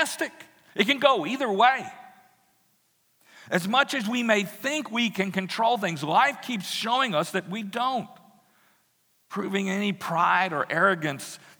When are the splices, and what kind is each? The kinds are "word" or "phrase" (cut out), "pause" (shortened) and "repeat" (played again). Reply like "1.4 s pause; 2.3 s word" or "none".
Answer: none